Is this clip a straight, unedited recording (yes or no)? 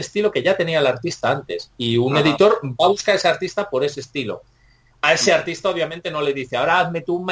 yes